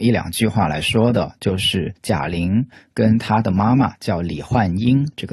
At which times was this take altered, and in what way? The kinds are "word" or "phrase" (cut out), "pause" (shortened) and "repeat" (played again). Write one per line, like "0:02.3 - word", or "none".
none